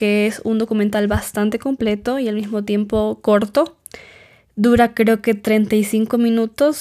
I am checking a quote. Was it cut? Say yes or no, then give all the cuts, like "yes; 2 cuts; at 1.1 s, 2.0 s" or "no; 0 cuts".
no; 0 cuts